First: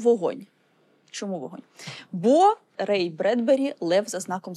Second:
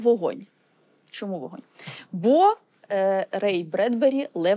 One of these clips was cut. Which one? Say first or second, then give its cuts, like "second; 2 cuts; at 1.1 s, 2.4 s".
first; 1 cut; at 2.7 s